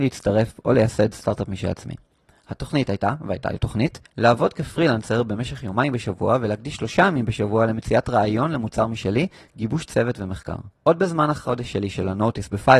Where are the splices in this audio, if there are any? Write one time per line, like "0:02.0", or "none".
0:10.8